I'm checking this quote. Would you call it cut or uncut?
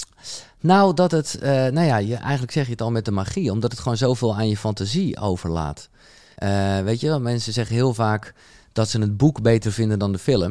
uncut